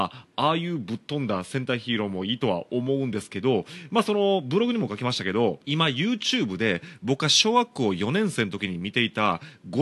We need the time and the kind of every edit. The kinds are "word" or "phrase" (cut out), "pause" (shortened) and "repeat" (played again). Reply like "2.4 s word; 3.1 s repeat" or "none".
5.6 s pause